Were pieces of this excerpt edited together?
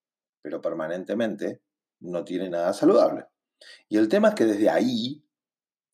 no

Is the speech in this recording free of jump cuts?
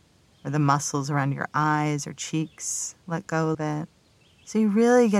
no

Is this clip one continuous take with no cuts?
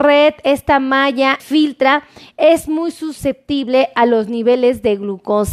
no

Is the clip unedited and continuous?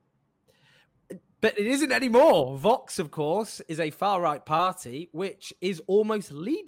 yes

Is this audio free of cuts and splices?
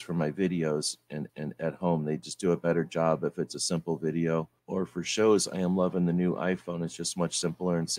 no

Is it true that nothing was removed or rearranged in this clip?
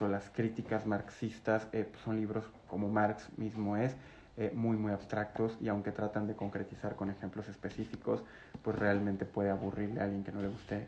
yes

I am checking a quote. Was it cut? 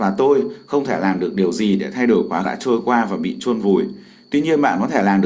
yes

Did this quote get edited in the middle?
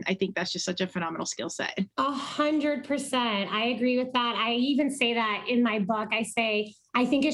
yes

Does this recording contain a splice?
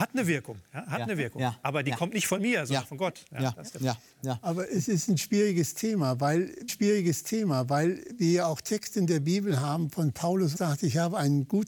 yes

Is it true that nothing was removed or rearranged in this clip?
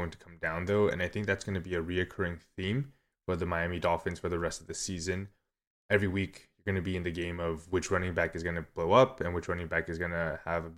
yes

